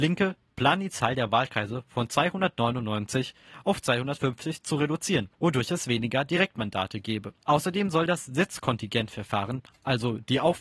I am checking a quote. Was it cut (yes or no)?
no